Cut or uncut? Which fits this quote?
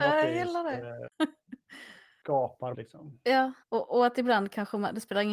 cut